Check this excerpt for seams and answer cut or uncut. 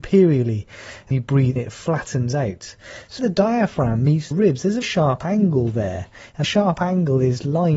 cut